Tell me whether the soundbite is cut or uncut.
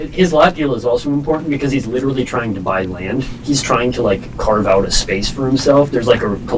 uncut